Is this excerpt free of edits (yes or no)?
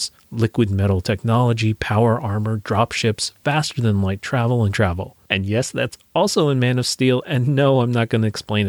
no